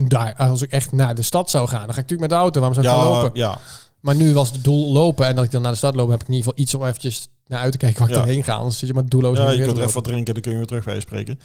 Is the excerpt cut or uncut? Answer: uncut